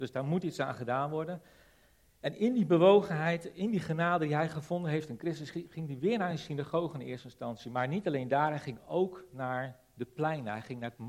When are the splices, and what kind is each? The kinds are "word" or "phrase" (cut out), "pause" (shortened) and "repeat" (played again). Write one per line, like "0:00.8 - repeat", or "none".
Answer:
none